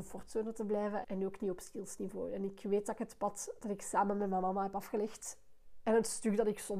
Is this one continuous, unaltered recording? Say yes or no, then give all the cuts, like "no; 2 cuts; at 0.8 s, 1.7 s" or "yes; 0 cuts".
no; 1 cut; at 1.0 s